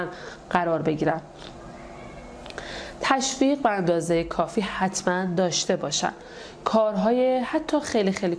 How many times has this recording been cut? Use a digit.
0